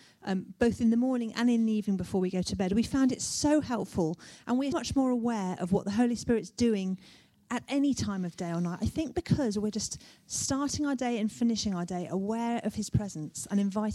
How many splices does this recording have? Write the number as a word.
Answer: one